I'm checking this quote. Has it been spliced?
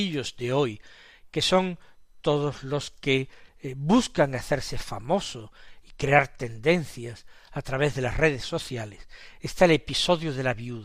no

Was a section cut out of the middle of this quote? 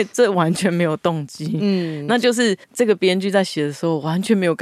yes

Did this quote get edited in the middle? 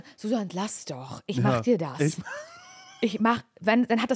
no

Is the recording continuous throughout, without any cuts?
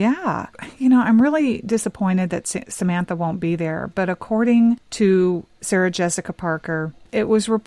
yes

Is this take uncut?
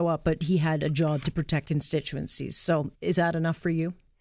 no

